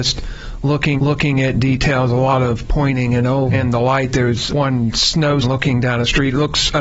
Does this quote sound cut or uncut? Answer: cut